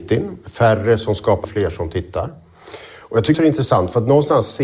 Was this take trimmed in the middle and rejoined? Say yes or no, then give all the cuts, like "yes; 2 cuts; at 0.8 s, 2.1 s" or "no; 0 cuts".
yes; 2 cuts; at 1.4 s, 3.3 s